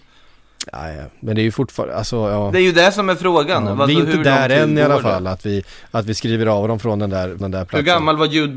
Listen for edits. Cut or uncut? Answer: cut